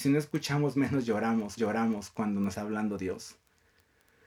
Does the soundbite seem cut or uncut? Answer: cut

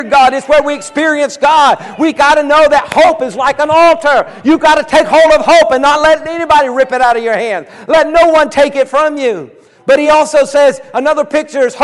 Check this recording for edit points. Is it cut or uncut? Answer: uncut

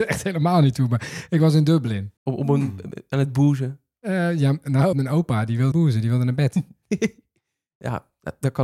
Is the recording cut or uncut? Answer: cut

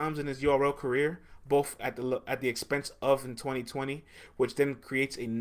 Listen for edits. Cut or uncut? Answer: uncut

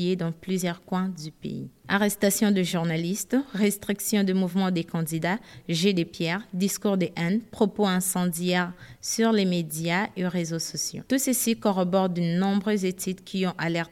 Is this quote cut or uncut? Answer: cut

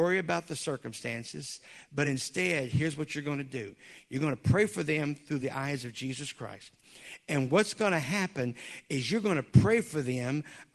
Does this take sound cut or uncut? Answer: uncut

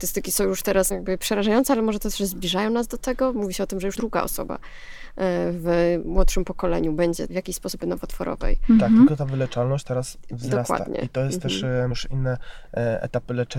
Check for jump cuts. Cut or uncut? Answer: cut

